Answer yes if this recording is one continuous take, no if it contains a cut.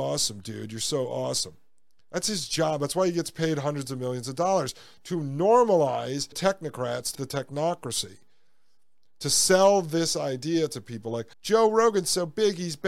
no